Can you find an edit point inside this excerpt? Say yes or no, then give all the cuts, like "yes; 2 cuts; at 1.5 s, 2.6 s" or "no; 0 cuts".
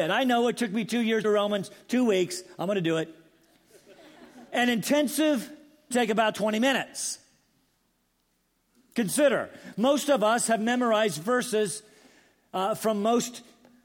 yes; 3 cuts; at 1.2 s, 4.5 s, 5.9 s